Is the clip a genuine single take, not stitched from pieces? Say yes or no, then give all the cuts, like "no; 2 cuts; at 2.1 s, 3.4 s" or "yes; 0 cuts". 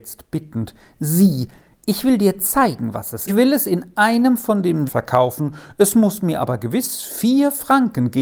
no; 2 cuts; at 3.3 s, 4.9 s